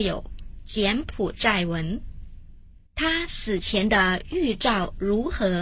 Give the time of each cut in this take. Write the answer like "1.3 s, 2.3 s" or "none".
2.9 s